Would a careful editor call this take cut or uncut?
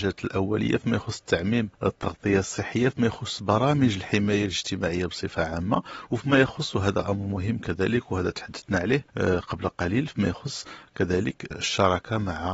uncut